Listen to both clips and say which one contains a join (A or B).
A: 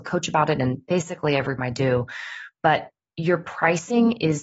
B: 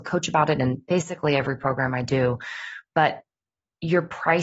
A